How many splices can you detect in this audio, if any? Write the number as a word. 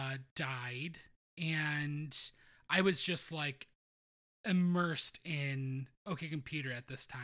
zero